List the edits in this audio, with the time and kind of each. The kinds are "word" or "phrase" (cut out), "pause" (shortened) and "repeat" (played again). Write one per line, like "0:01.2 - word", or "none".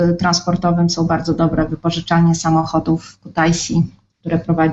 none